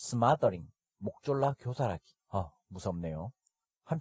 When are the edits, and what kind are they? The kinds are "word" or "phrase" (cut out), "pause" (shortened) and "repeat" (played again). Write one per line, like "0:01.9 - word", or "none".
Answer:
0:02.2 - pause